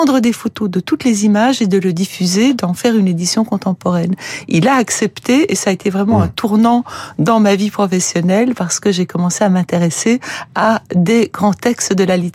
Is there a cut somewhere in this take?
no; 0 cuts

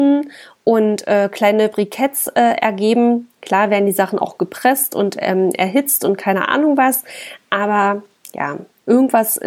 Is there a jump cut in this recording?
no; 0 cuts

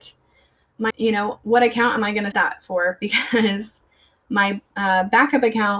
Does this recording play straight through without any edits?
no; 2 cuts; at 0.9 s, 2.3 s

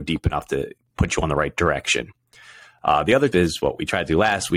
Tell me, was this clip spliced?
yes; 1 cut; at 3.3 s

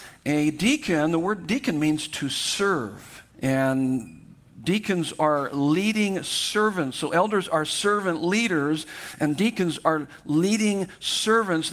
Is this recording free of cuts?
no; 1 cut; at 3.3 s

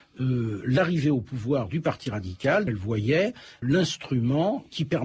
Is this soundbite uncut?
no; 2 cuts; at 2.7 s, 3.6 s

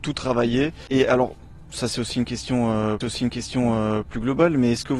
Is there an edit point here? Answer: yes; 1 cut; at 3.0 s

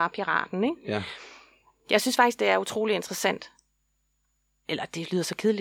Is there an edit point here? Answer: no; 0 cuts

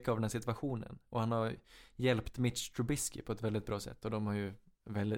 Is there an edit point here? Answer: no; 0 cuts

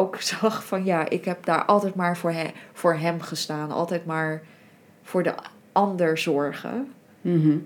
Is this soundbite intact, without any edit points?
yes; 0 cuts

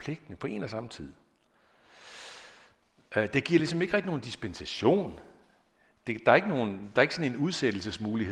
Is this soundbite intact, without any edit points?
yes; 0 cuts

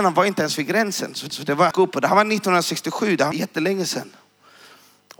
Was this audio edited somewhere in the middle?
yes; 3 cuts; at 1.3 s, 1.7 s, 3.3 s

